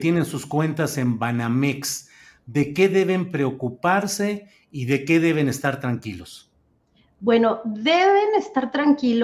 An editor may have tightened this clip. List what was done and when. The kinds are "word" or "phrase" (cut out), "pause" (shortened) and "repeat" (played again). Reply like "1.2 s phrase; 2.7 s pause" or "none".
none